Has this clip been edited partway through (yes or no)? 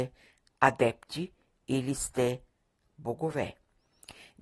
no